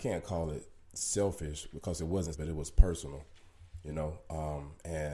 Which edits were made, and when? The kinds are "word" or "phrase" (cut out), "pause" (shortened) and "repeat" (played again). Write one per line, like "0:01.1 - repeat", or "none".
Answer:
0:02.3 - word